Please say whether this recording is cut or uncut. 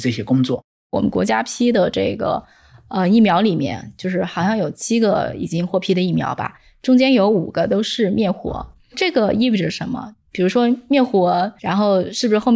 cut